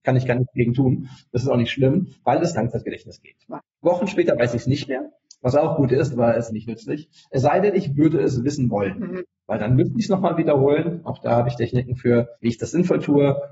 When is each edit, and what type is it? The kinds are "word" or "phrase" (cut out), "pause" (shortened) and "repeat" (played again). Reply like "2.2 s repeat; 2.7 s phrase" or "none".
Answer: 2.1 s pause; 2.6 s phrase; 6.5 s phrase; 12.3 s pause